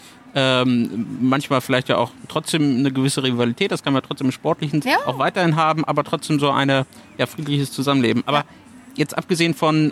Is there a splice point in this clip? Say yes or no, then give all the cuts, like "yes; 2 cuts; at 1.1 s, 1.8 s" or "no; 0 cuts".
yes; 1 cut; at 4.8 s